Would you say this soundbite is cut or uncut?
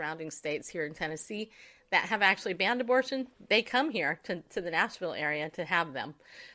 uncut